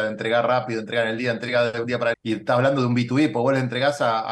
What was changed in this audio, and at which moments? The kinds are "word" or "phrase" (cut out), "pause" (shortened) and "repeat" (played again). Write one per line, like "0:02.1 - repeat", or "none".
0:02.1 - word